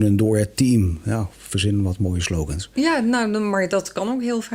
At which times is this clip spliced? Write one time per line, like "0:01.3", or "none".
none